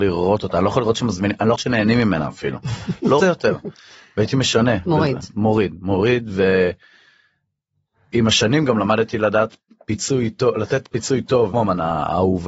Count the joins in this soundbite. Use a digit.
3